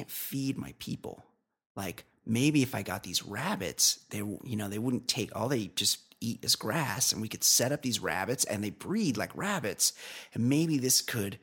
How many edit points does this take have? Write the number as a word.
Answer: zero